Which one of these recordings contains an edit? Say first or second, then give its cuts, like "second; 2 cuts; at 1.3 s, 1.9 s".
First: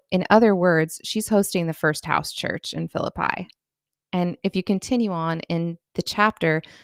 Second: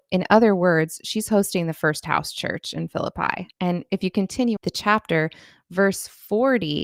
second; 2 cuts; at 3.5 s, 4.6 s